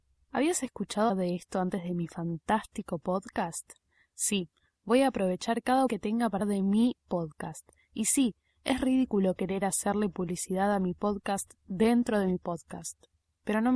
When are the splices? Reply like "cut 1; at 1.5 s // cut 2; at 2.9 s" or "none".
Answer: cut 1; at 1.1 s // cut 2; at 5.9 s // cut 3; at 6.4 s